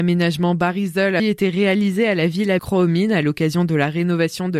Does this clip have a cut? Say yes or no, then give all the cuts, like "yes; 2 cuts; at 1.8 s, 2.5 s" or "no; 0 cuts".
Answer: yes; 2 cuts; at 1.2 s, 2.6 s